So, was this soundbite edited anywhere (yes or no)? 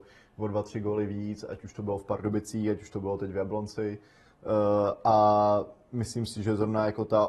no